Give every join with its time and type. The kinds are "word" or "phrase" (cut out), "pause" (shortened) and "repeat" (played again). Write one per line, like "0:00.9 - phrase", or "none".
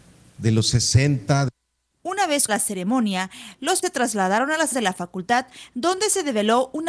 0:02.5 - word
0:03.8 - word
0:04.7 - word